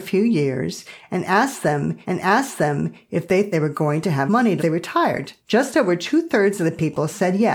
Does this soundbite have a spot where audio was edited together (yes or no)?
yes